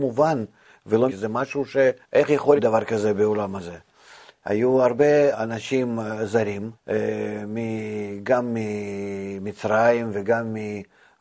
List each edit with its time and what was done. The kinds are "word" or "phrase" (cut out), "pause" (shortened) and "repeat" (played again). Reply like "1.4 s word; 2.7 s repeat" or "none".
1.1 s phrase; 2.0 s pause; 2.6 s word; 5.3 s word; 6.7 s pause